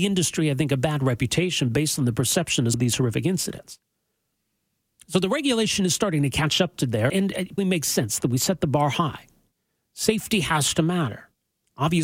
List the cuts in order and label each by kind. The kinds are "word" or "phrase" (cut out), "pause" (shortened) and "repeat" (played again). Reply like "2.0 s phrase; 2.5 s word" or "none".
2.7 s word; 7.1 s word; 7.6 s word